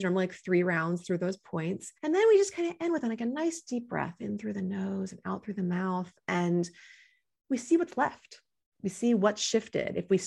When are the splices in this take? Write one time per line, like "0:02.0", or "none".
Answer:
0:02.0
0:08.7